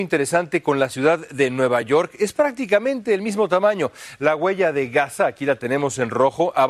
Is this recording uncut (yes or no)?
yes